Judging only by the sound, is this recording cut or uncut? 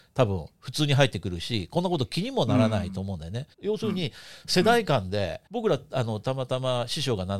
cut